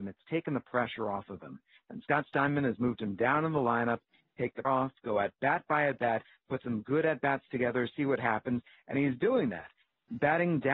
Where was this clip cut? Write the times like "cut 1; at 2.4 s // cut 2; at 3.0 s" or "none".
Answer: cut 1; at 4.6 s